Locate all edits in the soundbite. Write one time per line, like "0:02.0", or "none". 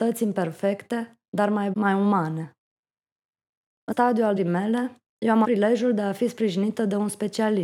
0:01.7
0:03.9
0:04.4
0:05.4